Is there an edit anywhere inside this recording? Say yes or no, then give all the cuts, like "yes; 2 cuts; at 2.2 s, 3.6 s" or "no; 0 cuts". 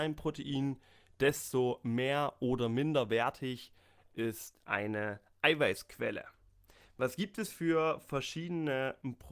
yes; 1 cut; at 4.6 s